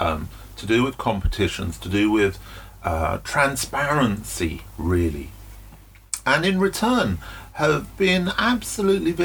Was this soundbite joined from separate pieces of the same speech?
no; 0 cuts

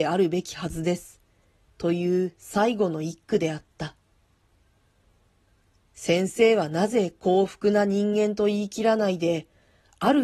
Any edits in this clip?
no; 0 cuts

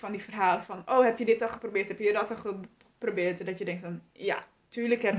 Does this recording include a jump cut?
no; 0 cuts

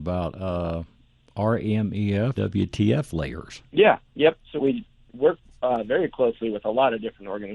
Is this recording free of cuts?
no; 3 cuts; at 2.4 s, 3.7 s, 4.6 s

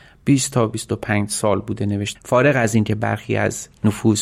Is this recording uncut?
no; 1 cut; at 2.2 s

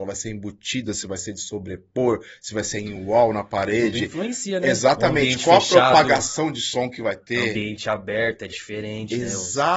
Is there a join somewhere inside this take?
no; 0 cuts

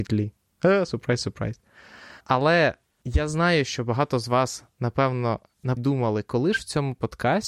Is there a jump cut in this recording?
yes; 2 cuts; at 2.2 s, 5.8 s

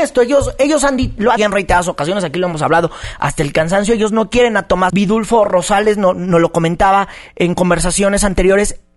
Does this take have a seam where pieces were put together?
yes; 2 cuts; at 1.4 s, 4.9 s

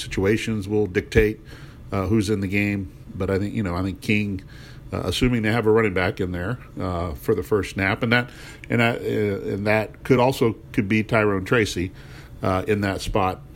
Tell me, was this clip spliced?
no; 0 cuts

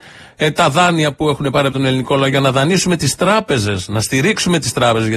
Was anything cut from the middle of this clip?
no; 0 cuts

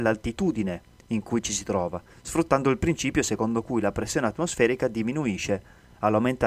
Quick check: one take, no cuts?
yes; 0 cuts

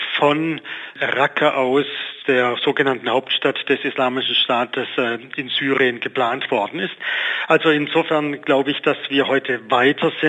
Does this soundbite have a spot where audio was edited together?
no; 0 cuts

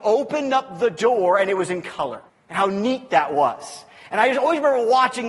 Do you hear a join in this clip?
yes; 1 cut; at 2.3 s

